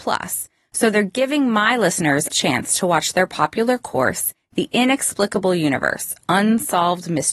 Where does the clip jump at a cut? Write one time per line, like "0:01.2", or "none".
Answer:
0:02.3